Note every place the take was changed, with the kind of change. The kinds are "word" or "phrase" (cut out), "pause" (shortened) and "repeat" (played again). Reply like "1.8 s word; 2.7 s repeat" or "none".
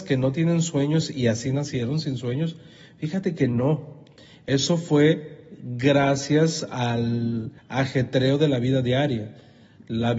7.6 s pause